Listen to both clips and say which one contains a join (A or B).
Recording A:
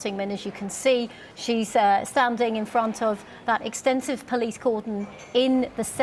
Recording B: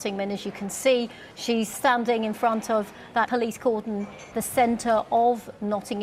B